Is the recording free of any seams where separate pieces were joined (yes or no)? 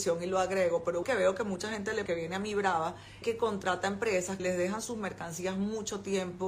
no